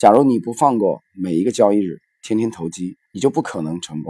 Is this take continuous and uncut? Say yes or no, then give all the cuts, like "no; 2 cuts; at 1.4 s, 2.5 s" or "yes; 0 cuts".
no; 1 cut; at 3.0 s